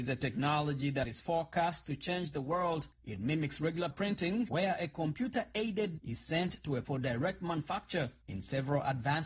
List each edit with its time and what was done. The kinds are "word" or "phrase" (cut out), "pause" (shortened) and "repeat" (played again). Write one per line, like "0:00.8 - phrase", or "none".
0:02.9 - pause
0:03.9 - word
0:06.0 - word
0:06.8 - word